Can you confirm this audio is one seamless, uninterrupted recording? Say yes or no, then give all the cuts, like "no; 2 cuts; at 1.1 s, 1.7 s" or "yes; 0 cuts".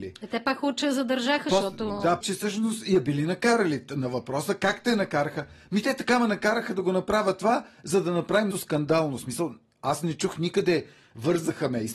no; 2 cuts; at 2.2 s, 8.5 s